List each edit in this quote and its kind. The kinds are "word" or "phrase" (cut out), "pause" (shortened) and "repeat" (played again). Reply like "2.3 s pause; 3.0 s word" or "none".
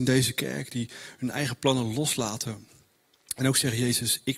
none